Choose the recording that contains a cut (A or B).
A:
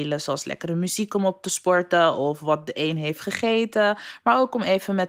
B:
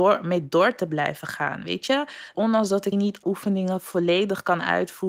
B